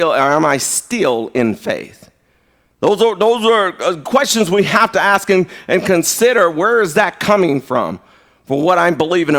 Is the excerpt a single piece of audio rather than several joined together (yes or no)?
yes